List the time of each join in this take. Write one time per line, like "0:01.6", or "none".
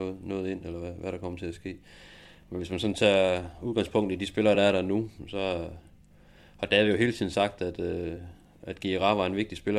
none